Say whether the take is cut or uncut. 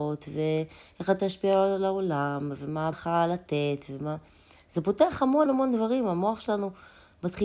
cut